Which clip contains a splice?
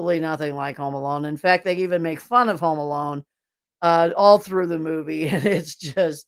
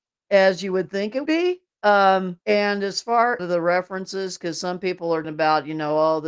second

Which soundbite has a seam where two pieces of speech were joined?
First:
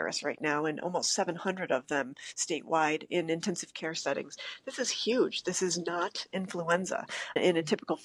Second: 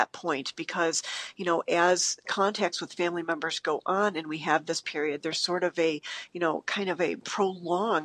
second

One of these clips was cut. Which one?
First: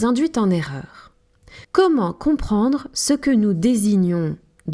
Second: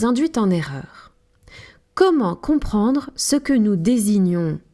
first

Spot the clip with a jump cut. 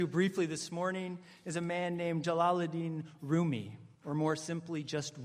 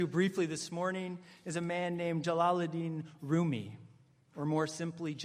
first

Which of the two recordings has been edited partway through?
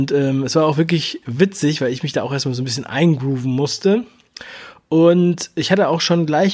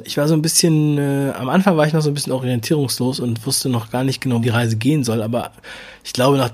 second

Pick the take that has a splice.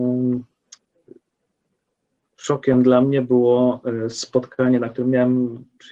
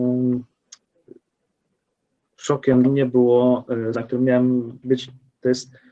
second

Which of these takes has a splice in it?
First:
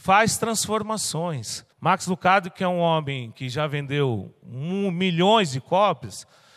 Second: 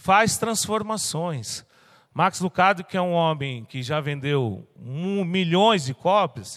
first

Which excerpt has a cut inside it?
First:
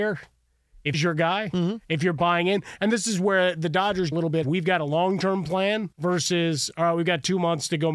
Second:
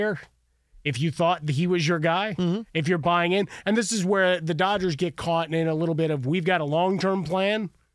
first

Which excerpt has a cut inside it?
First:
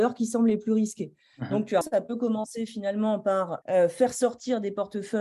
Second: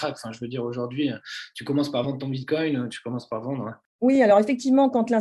first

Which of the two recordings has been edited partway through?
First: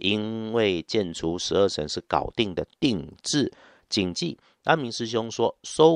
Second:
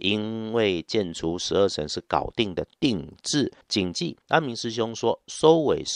second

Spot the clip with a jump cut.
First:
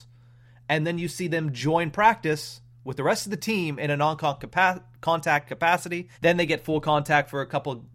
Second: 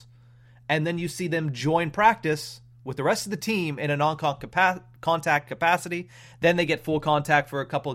first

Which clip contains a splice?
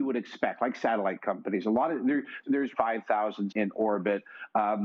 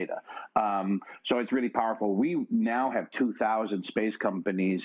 first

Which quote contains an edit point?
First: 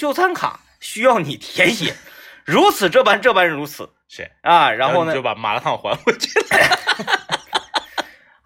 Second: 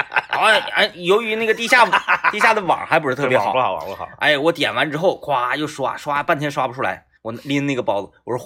second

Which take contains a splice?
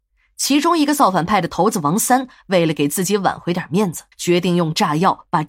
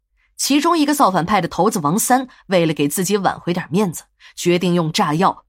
first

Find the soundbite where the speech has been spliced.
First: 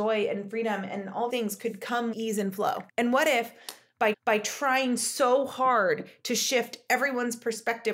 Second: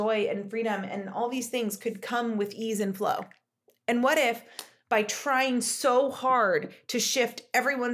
first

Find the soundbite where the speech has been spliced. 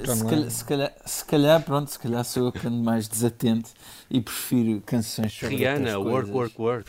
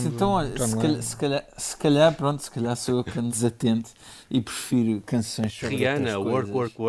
second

